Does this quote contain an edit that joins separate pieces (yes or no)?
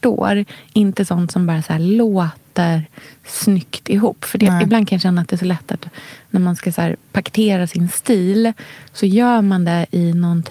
no